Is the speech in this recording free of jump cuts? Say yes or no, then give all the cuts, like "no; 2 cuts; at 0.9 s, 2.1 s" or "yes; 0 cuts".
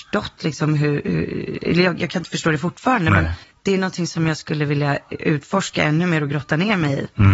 no; 1 cut; at 3.4 s